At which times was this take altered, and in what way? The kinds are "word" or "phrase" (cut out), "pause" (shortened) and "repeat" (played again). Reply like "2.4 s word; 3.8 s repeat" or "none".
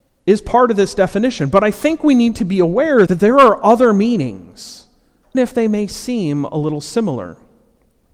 3.1 s word; 5.3 s word